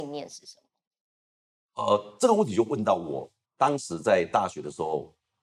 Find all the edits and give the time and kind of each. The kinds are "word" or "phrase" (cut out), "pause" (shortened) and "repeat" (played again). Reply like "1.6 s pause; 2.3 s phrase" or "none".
3.5 s pause

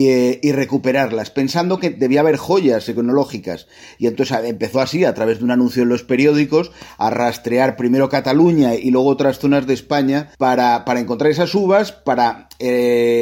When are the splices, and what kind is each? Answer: 10.3 s pause

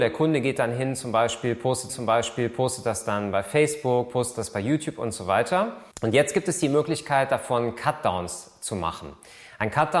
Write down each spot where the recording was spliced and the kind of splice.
1.9 s repeat; 5.9 s pause

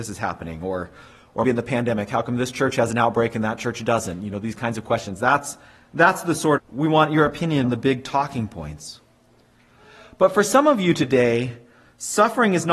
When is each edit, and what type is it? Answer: 1.4 s word; 6.6 s word; 7.6 s word

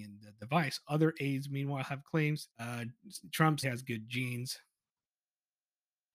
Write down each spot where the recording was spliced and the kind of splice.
2.5 s pause; 3.6 s word

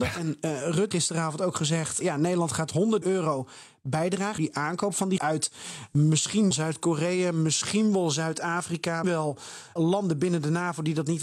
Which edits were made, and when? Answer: 0.9 s word; 2.0 s word; 3.0 s word; 4.4 s word; 5.2 s word; 6.5 s word; 9.0 s word; 9.8 s word

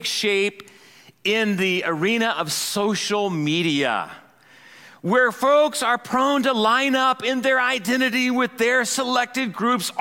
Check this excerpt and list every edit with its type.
none

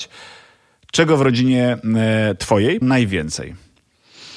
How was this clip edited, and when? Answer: 2.8 s word

